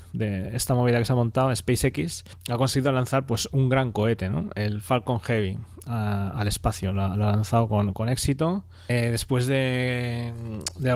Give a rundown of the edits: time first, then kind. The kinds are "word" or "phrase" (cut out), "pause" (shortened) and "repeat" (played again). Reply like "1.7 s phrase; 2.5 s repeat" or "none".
none